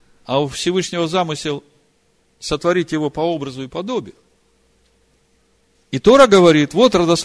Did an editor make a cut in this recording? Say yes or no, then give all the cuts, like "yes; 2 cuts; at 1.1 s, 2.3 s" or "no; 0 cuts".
no; 0 cuts